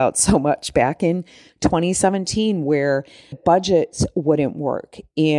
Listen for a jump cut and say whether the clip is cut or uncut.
cut